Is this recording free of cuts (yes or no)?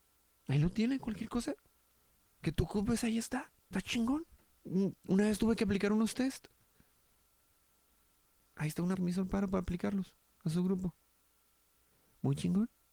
no